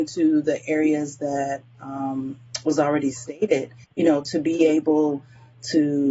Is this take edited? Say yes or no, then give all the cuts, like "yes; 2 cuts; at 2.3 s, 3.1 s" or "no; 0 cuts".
yes; 1 cut; at 3.8 s